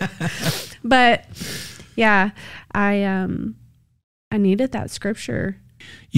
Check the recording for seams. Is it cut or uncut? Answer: uncut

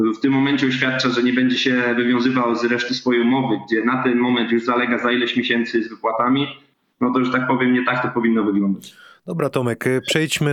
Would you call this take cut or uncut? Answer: uncut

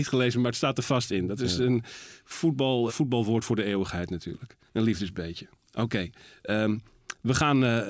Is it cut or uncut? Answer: cut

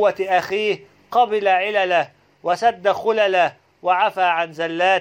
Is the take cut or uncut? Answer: uncut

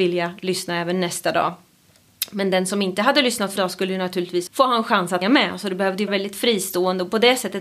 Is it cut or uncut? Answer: cut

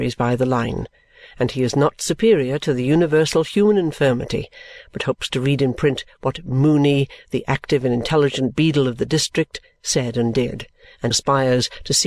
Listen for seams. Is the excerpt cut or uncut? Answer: cut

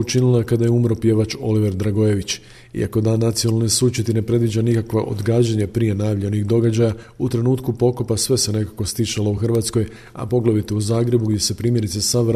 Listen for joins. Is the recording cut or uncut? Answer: uncut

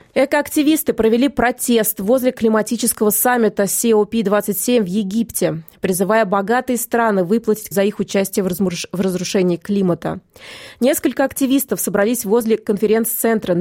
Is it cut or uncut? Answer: cut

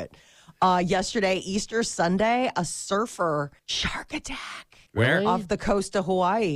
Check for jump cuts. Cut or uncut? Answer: cut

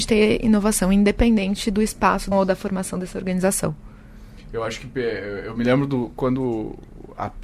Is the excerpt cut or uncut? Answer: cut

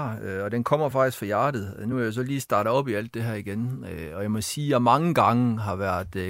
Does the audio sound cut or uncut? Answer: uncut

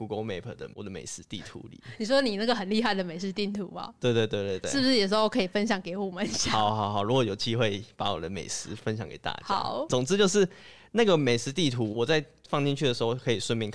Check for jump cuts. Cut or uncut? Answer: cut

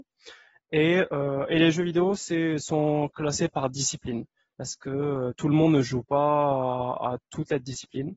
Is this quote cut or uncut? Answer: uncut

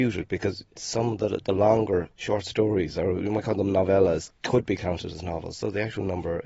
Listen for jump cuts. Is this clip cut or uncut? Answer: uncut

